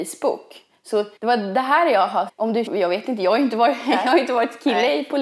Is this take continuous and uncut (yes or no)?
no